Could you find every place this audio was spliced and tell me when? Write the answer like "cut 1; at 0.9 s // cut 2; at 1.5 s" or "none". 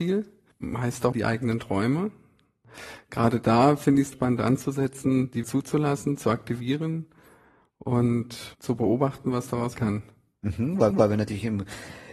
cut 1; at 1.1 s // cut 2; at 4.1 s // cut 3; at 5.4 s // cut 4; at 8.5 s // cut 5; at 9.7 s // cut 6; at 10.9 s

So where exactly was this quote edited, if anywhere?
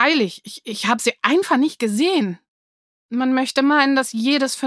none

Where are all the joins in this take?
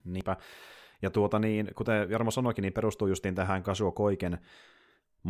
none

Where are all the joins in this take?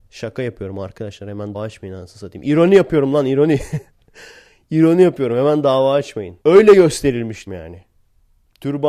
cut 1; at 1.5 s // cut 2; at 3.9 s // cut 3; at 6.4 s // cut 4; at 7.5 s

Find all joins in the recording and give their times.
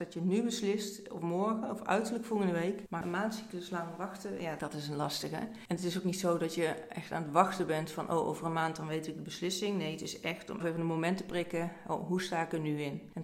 cut 1; at 10.6 s

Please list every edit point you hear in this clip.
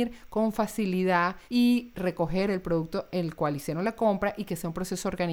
cut 1; at 1.4 s

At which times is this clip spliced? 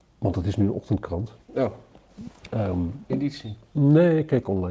cut 1; at 1.4 s // cut 2; at 3.1 s

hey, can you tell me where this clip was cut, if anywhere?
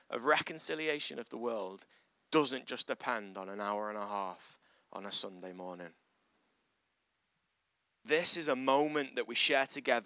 none

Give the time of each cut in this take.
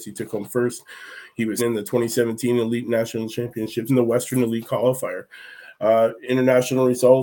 cut 1; at 1.6 s // cut 2; at 3.9 s

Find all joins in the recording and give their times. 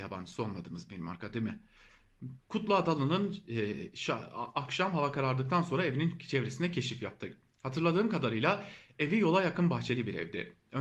cut 1; at 2.4 s

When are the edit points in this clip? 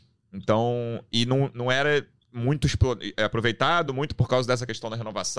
none

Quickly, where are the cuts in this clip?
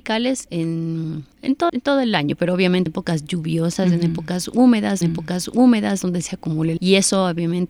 cut 1; at 1.3 s // cut 2; at 1.7 s // cut 3; at 2.9 s // cut 4; at 5.0 s // cut 5; at 6.8 s

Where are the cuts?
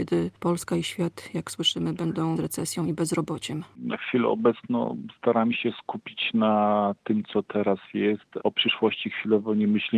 cut 1; at 2.4 s // cut 2; at 8.4 s

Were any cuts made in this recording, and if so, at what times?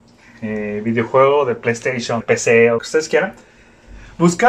cut 1; at 2.2 s // cut 2; at 2.8 s

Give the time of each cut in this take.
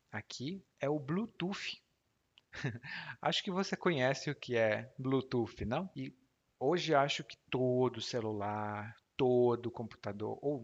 none

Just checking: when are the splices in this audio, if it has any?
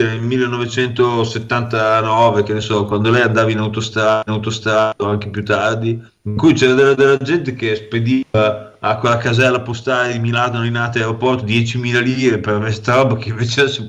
cut 1; at 4.3 s // cut 2; at 6.1 s // cut 3; at 7.0 s

